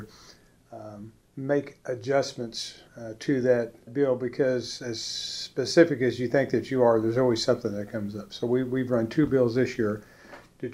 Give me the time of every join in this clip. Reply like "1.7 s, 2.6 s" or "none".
1.2 s, 2.9 s, 3.9 s, 4.8 s